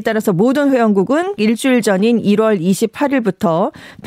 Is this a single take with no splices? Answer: no; 1 cut; at 1.4 s

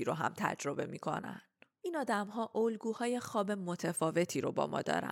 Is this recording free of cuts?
yes; 0 cuts

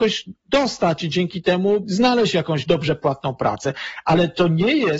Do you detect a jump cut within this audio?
yes; 1 cut; at 1.8 s

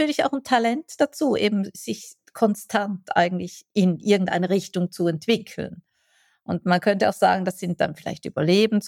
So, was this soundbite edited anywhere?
no; 0 cuts

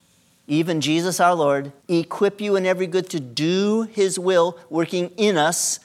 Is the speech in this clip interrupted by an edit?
yes; 2 cuts; at 1.8 s, 3.1 s

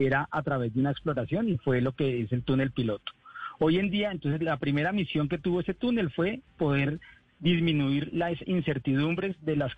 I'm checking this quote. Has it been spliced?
no; 0 cuts

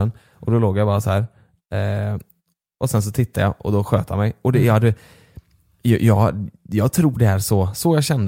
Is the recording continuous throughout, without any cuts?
yes; 0 cuts

